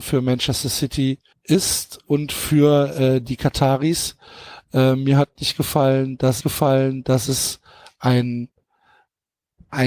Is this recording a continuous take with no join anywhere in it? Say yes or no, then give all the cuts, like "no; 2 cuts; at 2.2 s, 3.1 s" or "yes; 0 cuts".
no; 2 cuts; at 1.3 s, 6.4 s